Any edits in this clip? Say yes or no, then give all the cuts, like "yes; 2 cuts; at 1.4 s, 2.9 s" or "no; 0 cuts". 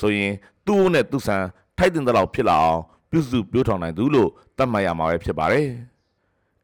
no; 0 cuts